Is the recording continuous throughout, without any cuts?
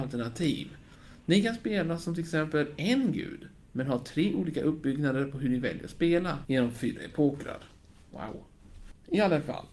yes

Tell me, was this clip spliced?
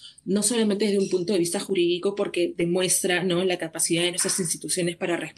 no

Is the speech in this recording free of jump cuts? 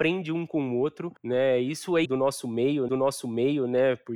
no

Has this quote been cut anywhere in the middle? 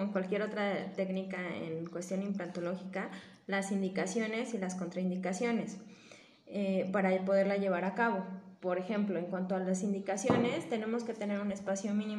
no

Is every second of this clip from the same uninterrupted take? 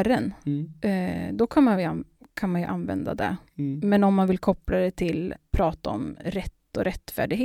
no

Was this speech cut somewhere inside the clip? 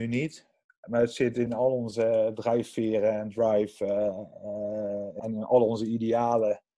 yes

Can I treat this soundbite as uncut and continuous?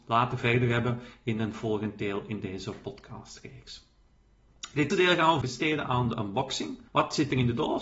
no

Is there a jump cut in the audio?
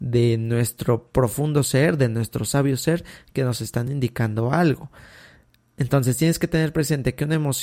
no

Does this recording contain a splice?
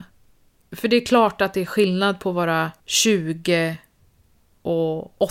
yes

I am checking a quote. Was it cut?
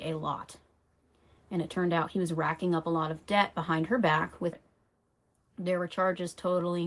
yes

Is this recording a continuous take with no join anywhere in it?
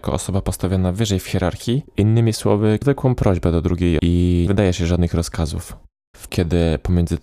no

